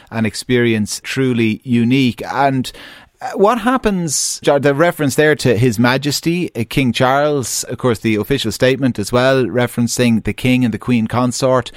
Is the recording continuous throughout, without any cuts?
no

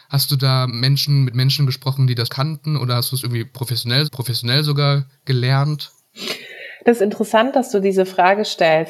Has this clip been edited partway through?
yes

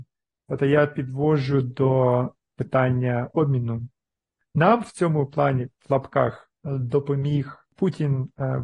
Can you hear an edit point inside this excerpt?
no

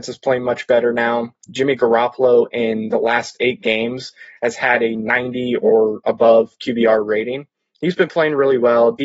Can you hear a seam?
no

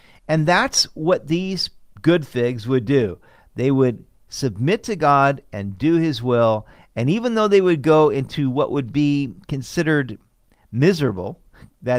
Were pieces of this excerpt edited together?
no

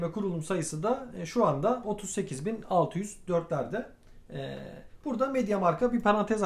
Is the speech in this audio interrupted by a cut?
no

